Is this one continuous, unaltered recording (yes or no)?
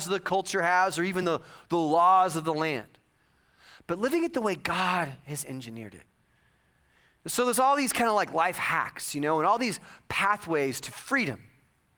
yes